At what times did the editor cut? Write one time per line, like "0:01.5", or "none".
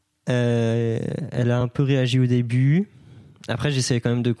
none